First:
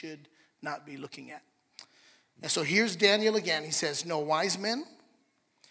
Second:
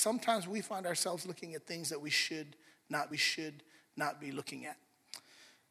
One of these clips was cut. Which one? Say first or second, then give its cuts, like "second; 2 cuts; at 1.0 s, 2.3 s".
second; 1 cut; at 3.1 s